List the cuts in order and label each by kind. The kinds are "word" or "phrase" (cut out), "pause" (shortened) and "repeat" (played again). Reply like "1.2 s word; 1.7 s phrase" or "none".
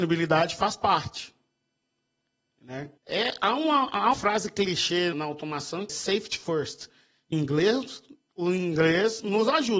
3.0 s pause; 4.1 s word; 5.1 s word; 5.9 s word; 7.3 s word